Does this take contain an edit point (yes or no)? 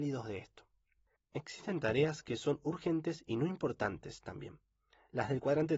no